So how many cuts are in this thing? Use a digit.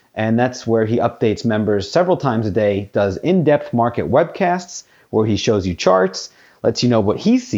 0